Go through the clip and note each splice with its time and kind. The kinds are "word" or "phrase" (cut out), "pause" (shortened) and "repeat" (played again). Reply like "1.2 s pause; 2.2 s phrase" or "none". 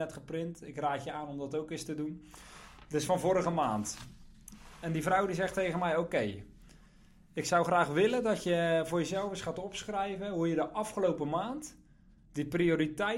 none